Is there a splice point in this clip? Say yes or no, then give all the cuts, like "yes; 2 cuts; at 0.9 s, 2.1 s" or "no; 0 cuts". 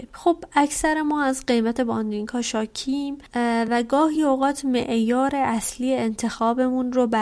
no; 0 cuts